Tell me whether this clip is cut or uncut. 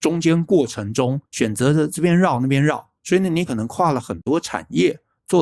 cut